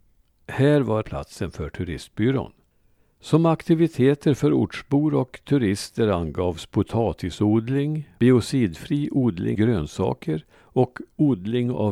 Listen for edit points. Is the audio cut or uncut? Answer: cut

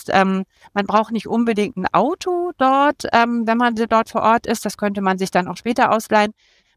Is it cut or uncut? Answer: uncut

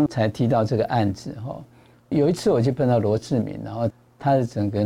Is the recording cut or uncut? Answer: uncut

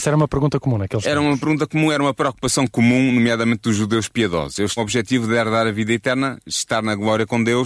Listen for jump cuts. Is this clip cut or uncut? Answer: cut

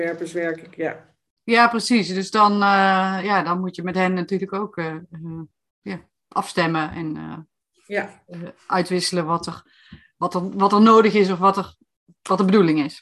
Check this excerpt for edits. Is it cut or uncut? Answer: uncut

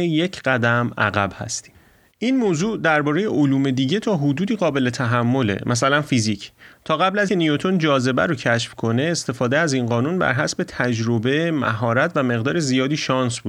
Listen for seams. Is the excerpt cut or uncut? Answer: cut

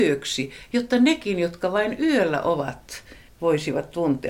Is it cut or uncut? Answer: cut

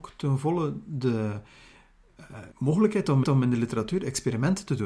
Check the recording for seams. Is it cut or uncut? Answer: cut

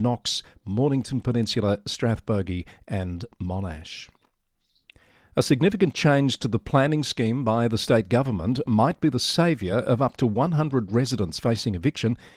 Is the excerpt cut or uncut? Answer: uncut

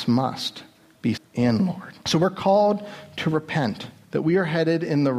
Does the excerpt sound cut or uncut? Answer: cut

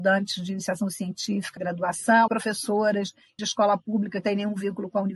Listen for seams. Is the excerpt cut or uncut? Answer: cut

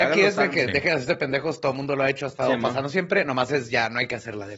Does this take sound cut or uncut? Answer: uncut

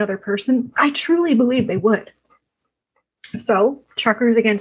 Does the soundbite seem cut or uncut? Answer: uncut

